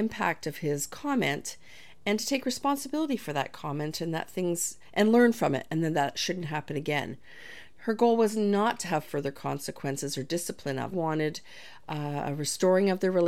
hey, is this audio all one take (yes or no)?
no